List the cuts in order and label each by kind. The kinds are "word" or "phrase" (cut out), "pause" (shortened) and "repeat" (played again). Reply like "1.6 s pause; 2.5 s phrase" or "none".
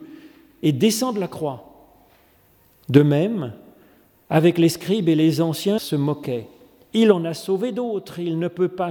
5.8 s phrase